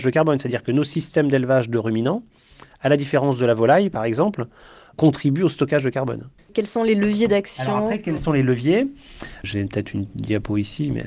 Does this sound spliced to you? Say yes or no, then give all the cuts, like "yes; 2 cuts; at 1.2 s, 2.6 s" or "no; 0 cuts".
no; 0 cuts